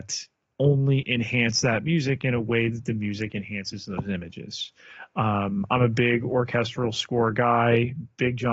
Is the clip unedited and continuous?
yes; 0 cuts

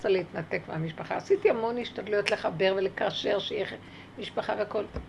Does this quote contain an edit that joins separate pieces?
no; 0 cuts

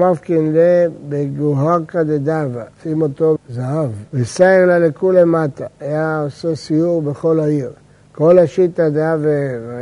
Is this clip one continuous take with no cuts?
no; 3 cuts; at 2.7 s, 3.4 s, 4.1 s

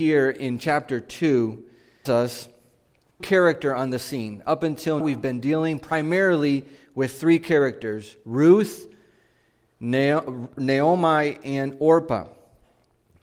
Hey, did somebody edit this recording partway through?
yes; 3 cuts; at 2.1 s, 3.2 s, 5.0 s

